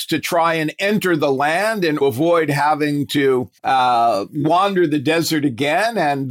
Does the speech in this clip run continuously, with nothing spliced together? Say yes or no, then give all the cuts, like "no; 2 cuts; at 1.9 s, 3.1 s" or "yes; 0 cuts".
no; 2 cuts; at 2.0 s, 3.6 s